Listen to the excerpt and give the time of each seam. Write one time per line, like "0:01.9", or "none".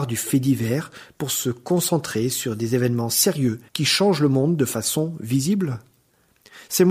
0:03.7